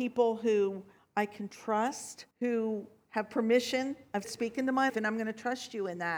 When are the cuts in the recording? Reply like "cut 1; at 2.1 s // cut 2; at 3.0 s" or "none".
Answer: cut 1; at 2.3 s // cut 2; at 4.2 s // cut 3; at 4.9 s